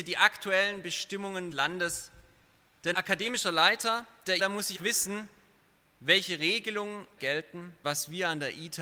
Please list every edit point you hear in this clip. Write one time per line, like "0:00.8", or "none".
0:01.5
0:02.9
0:04.4
0:04.7
0:07.2
0:07.8